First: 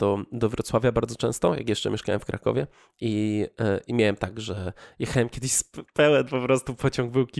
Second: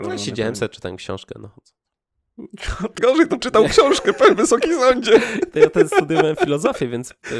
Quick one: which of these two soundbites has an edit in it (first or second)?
second